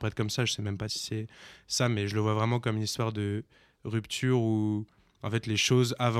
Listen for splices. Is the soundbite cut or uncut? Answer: uncut